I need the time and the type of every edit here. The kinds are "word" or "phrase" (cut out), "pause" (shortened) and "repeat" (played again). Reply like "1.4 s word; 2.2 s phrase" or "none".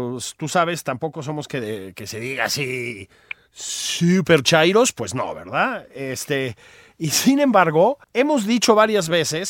8.0 s pause